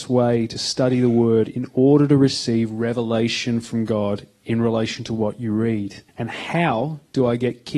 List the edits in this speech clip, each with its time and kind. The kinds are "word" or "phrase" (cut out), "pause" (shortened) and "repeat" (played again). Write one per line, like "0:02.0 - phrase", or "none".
0:06.1 - pause